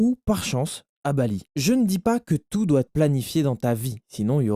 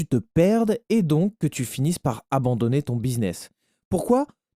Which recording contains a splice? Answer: first; 2 cuts; at 1.5 s, 2.9 s

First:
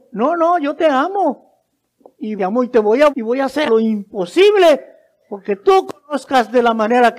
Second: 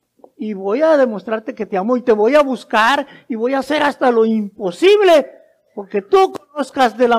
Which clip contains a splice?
first; 3 cuts; at 2.4 s, 3.1 s, 3.7 s

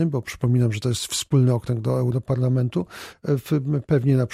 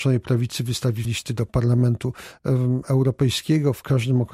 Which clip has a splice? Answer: second; 1 cut; at 1.0 s

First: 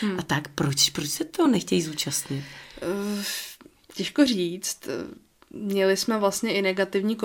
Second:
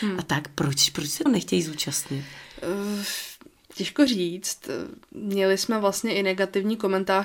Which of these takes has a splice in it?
second; 2 cuts; at 1.3 s, 5.0 s

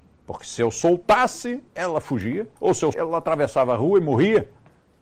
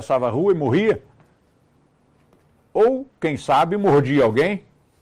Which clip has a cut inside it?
first; 3 cuts; at 1.7 s, 2.6 s, 2.9 s

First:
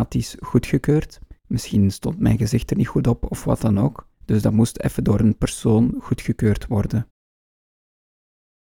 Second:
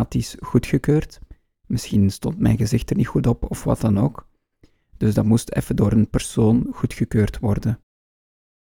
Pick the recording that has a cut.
first; 2 cuts; at 1.4 s, 4.1 s

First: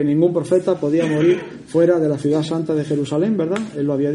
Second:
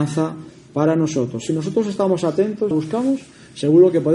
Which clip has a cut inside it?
second; 1 cut; at 2.7 s

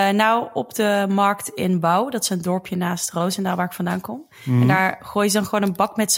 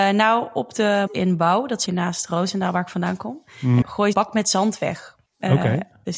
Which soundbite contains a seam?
second; 5 cuts; at 1.1 s, 1.9 s, 3.8 s, 4.1 s, 5.3 s

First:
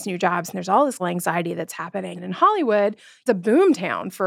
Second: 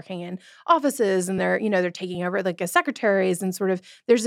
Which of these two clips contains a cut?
first; 3 cuts; at 1.0 s, 2.2 s, 3.3 s

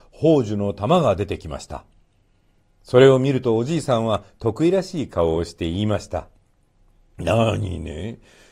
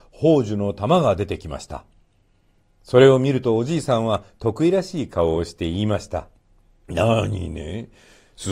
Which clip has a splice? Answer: second; 1 cut; at 6.4 s

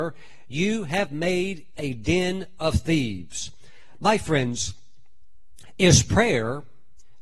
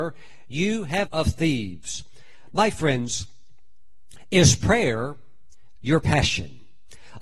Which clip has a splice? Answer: second; 1 cut; at 1.1 s

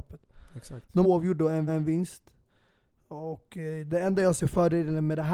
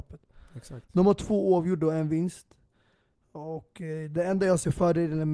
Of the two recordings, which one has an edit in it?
first; 2 cuts; at 1.0 s, 1.7 s

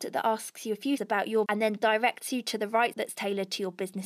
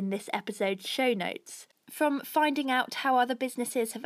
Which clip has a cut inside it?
first; 3 cuts; at 1.0 s, 1.5 s, 2.9 s

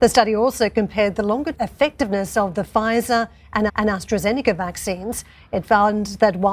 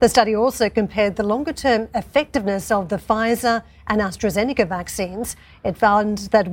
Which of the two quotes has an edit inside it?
first; 2 cuts; at 1.5 s, 3.7 s

